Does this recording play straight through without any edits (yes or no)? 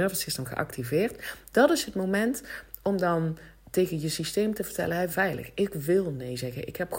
no